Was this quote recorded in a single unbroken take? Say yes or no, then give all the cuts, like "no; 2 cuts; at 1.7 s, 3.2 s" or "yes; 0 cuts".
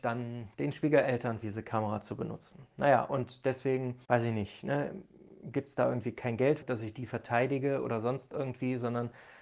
no; 3 cuts; at 1.4 s, 4.0 s, 6.6 s